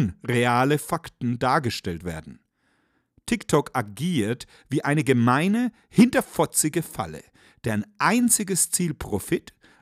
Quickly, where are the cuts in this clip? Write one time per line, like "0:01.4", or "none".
none